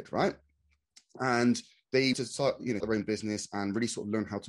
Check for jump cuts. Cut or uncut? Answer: cut